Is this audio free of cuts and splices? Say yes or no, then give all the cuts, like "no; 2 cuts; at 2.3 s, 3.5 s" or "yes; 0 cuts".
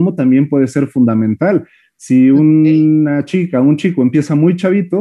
yes; 0 cuts